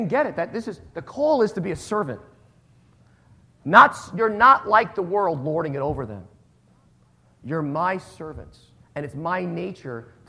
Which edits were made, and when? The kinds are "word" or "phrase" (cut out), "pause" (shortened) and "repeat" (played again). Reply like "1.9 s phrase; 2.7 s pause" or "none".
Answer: none